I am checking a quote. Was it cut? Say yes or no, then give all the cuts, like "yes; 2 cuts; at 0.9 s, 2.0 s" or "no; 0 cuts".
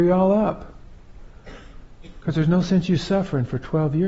no; 0 cuts